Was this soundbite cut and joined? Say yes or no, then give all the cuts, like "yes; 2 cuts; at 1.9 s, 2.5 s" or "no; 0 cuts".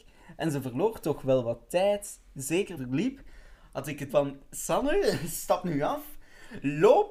yes; 2 cuts; at 2.8 s, 4.1 s